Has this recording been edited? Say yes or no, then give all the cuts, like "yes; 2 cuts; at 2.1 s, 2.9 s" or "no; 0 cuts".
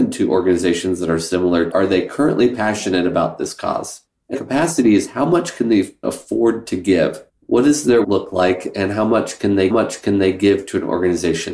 yes; 6 cuts; at 1.7 s, 4.3 s, 6.0 s, 7.3 s, 8.0 s, 9.7 s